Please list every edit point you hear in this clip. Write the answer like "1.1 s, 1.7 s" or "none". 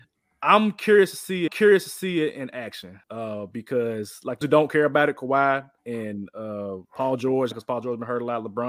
1.5 s, 3.0 s, 4.4 s, 5.8 s, 6.8 s, 7.5 s